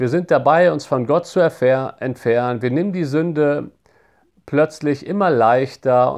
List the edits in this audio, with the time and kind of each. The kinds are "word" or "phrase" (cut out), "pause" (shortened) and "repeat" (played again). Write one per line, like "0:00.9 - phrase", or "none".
none